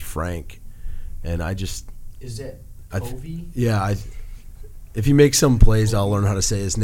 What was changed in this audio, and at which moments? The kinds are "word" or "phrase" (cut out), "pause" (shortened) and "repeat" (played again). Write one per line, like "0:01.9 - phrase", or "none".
none